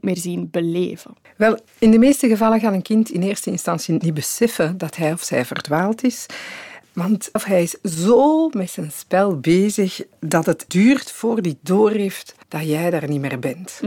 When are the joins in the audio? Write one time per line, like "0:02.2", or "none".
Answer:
0:01.7
0:07.4
0:10.7
0:12.4